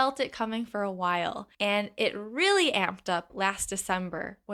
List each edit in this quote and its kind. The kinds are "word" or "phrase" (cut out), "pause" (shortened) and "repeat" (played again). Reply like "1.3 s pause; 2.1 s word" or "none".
1.5 s pause